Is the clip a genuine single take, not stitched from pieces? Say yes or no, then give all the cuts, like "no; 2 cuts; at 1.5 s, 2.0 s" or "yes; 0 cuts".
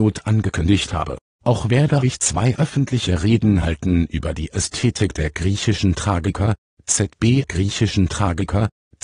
no; 1 cut; at 7.4 s